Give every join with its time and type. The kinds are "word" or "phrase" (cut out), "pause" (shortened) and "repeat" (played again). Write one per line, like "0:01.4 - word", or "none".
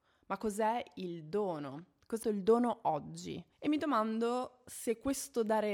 0:02.2 - word
0:03.5 - pause